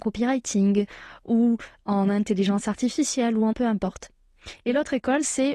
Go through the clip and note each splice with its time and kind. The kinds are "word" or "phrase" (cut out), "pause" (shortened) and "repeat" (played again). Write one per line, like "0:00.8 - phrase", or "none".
0:03.5 - word